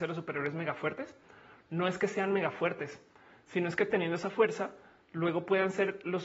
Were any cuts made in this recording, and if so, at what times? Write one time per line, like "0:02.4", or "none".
none

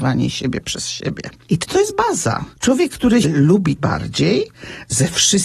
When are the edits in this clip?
0:01.6
0:03.2
0:03.8

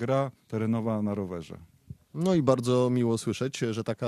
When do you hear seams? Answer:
none

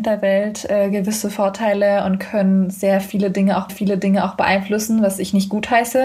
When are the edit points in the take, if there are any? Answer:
0:03.7

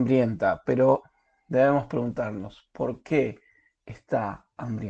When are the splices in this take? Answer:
none

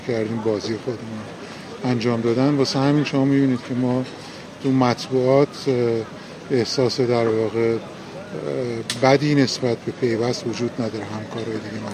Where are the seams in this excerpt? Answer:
none

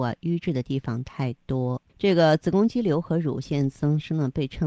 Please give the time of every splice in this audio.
0:01.9

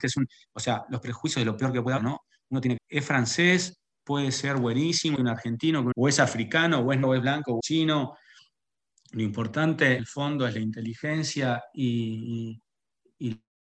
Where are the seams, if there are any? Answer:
0:02.0
0:02.8
0:05.2
0:05.9
0:07.0
0:07.6
0:10.0

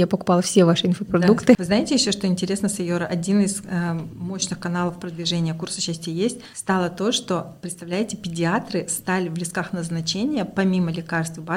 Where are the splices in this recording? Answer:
none

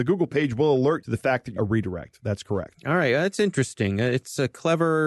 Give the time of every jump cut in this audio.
0:01.0
0:01.6

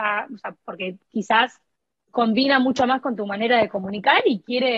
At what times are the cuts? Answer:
none

